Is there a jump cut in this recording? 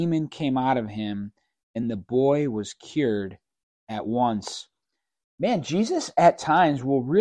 no; 0 cuts

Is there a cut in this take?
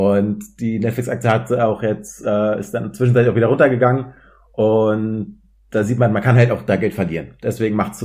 no; 0 cuts

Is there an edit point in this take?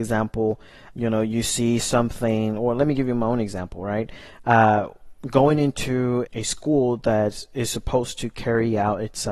yes; 2 cuts; at 0.9 s, 6.3 s

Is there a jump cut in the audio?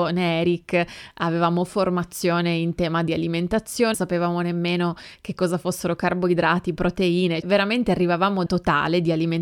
yes; 3 cuts; at 3.9 s, 7.4 s, 8.5 s

